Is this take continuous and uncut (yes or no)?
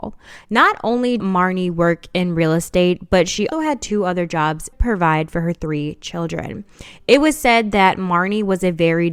no